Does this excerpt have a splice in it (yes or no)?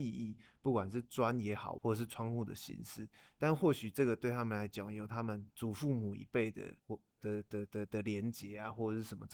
yes